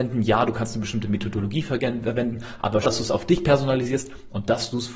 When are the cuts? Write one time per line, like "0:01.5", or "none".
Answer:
0:02.8